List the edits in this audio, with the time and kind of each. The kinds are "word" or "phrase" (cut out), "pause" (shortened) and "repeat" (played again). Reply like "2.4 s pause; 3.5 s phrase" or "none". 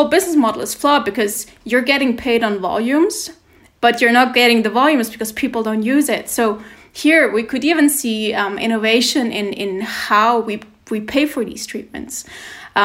none